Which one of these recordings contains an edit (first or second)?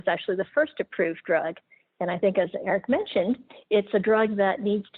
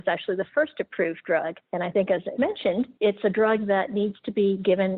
second